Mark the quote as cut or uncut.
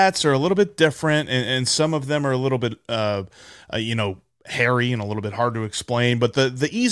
uncut